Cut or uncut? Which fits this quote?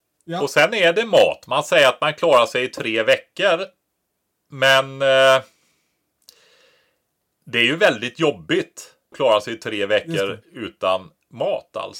cut